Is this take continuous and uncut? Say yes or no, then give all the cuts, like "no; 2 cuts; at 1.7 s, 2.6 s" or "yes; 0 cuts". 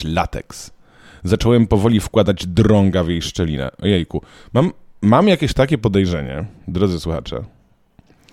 yes; 0 cuts